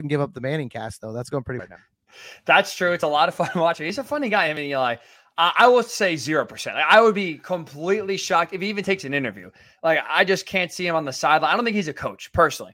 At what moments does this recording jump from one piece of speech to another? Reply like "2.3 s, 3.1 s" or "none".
1.6 s